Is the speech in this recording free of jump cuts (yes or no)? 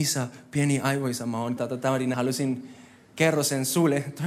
no